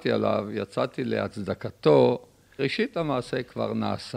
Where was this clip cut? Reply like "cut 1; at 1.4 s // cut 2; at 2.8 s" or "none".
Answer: cut 1; at 2.6 s